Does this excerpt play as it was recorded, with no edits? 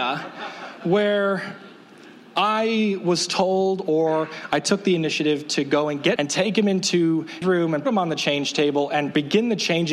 no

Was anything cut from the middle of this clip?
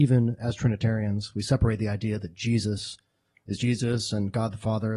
no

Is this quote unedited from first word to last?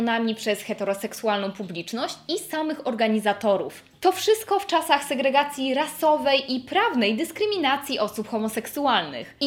yes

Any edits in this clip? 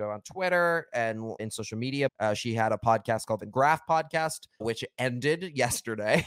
yes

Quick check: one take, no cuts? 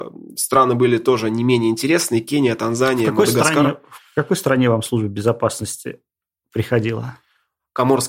yes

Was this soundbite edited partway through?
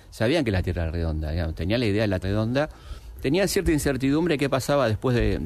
yes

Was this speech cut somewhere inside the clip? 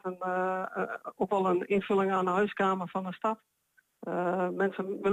no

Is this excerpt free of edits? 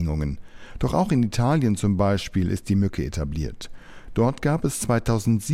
yes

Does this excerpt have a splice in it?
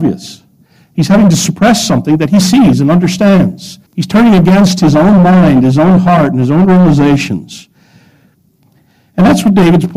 yes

